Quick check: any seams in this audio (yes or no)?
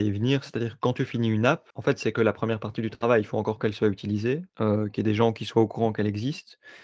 yes